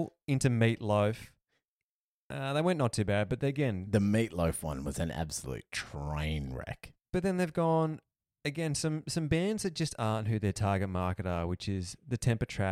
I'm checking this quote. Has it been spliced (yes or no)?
no